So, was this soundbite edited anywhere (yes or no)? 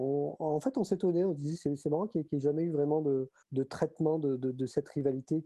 yes